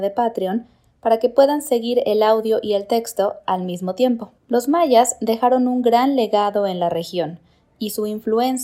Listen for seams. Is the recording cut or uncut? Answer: cut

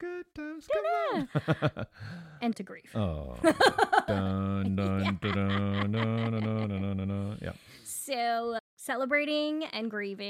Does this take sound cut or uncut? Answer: cut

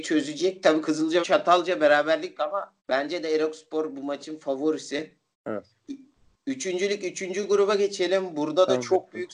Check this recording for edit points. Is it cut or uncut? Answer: cut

